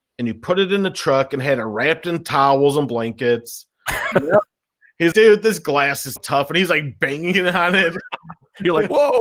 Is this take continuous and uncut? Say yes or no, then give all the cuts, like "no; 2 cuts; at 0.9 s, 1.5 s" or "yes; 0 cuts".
no; 3 cuts; at 4.1 s, 5.1 s, 6.2 s